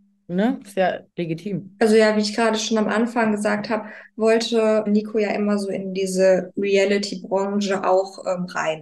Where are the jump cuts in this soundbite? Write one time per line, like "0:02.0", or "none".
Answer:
0:01.1
0:04.9